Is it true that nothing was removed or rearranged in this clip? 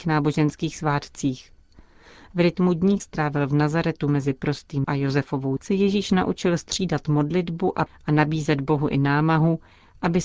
no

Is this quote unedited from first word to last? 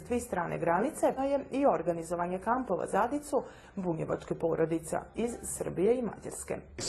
no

